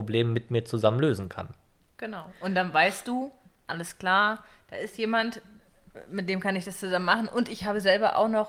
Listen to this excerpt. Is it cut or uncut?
uncut